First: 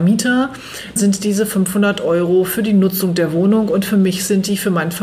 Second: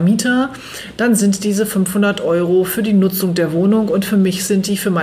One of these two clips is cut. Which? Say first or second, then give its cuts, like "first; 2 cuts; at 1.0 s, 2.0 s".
first; 1 cut; at 1.0 s